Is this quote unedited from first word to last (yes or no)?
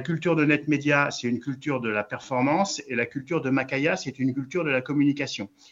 yes